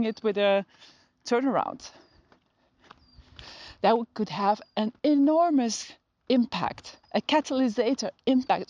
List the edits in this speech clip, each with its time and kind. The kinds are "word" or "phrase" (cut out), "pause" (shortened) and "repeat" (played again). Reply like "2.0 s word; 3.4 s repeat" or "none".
5.0 s pause; 7.0 s pause